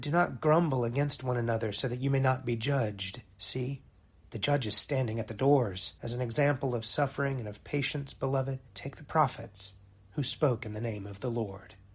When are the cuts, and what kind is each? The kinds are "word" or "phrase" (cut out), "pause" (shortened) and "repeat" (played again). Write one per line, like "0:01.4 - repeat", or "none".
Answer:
0:03.3 - pause
0:06.0 - pause
0:08.7 - pause